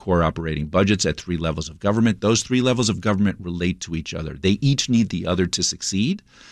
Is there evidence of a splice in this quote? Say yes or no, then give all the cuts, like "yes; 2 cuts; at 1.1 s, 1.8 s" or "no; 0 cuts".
no; 0 cuts